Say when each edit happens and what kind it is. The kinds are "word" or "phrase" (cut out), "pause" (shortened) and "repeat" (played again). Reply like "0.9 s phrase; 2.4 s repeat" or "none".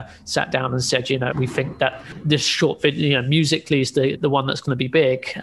1.3 s word; 4.1 s word

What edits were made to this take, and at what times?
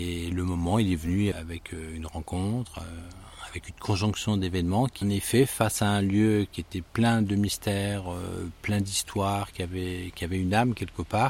1.3 s word; 5.0 s phrase; 6.9 s pause

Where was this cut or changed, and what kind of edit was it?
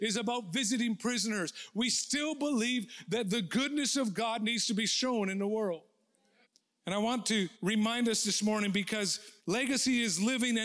6.4 s pause; 7.5 s pause; 9.4 s pause

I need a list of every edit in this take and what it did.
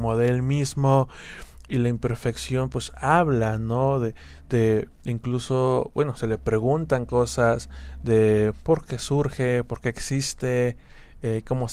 4.9 s pause

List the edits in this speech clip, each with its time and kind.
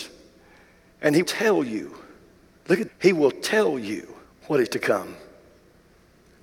1.2 s word; 2.9 s word; 4.2 s pause; 4.7 s word

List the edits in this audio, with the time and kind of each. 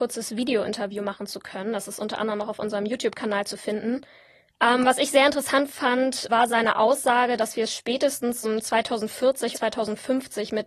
6.3 s word; 8.4 s word; 9.5 s word

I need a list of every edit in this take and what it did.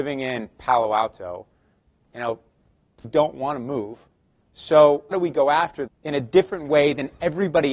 3.0 s word; 5.1 s word; 5.9 s word

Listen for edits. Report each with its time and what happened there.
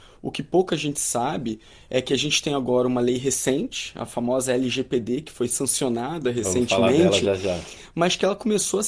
none

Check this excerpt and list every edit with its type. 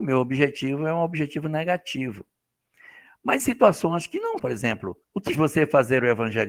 3.4 s word; 4.4 s word; 5.0 s pause; 5.3 s word

